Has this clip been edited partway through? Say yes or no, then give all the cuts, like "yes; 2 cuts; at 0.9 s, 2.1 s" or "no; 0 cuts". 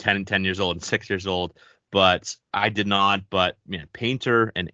yes; 1 cut; at 2.4 s